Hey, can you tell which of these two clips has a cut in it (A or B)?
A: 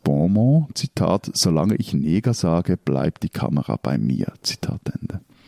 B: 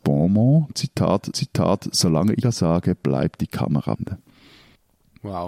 B